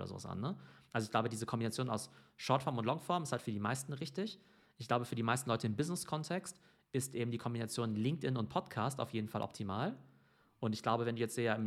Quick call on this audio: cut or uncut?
uncut